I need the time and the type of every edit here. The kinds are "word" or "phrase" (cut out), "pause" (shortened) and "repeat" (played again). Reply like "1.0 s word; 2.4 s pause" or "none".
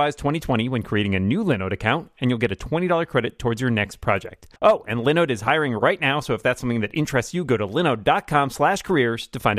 4.6 s pause